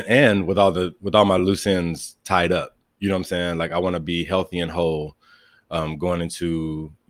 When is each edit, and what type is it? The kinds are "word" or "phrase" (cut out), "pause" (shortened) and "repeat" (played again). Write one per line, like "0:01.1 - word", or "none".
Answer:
none